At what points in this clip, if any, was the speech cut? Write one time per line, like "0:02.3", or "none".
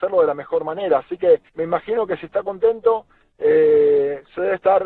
0:01.5